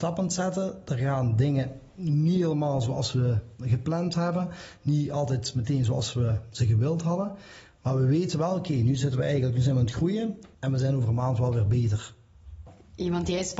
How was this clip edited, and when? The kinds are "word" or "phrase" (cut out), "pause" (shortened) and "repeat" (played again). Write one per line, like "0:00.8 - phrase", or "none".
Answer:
0:10.5 - pause